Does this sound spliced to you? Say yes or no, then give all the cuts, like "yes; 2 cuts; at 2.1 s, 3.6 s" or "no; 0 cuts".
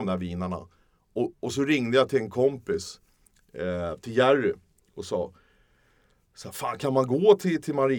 yes; 1 cut; at 1.3 s